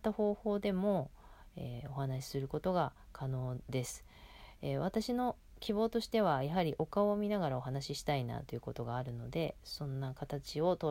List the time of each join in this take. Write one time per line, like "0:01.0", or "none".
none